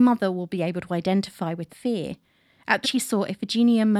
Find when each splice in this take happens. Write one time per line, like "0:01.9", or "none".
0:01.7
0:02.8